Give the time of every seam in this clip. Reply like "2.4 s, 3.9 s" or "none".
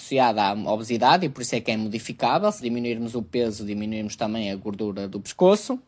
2.6 s

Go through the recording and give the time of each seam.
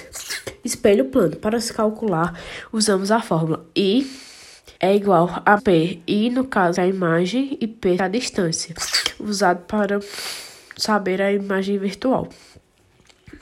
4.8 s, 5.6 s, 6.8 s, 8.0 s

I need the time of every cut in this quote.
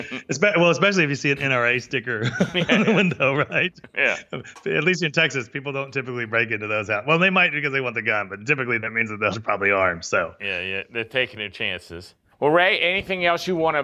9.3 s, 12.3 s

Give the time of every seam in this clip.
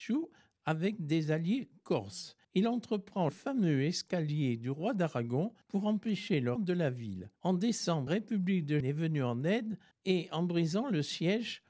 2.4 s, 3.3 s, 5.6 s, 6.6 s, 7.4 s, 8.1 s, 8.8 s, 9.9 s

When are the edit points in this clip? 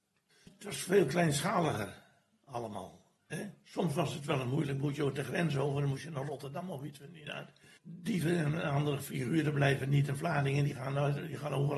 3.2 s

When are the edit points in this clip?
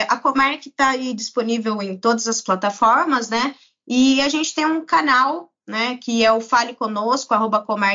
none

